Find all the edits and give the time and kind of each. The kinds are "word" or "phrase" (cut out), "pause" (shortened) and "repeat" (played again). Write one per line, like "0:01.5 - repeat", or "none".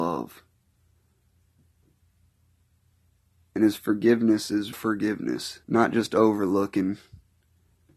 0:04.7 - word
0:05.6 - pause